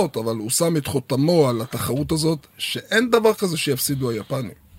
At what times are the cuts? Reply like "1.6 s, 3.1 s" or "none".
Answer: 2.5 s